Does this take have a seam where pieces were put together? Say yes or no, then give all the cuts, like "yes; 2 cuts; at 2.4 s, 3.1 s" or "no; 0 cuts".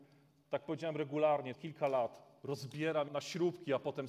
yes; 2 cuts; at 1.5 s, 3.1 s